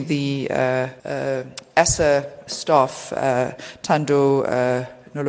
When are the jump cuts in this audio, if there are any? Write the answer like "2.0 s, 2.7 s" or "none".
1.0 s, 2.5 s